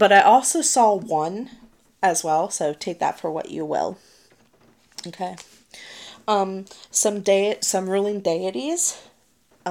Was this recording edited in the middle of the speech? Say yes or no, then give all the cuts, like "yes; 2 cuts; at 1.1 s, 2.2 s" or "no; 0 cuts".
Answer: no; 0 cuts